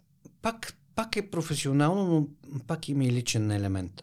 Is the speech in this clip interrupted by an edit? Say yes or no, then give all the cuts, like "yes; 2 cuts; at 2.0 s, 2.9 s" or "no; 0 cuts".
no; 0 cuts